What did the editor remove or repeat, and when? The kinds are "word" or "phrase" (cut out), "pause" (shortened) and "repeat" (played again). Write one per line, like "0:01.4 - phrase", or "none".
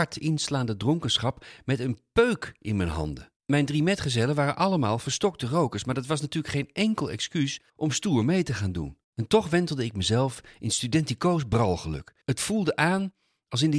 0:03.4 - pause
0:07.7 - pause
0:09.0 - pause
0:12.2 - pause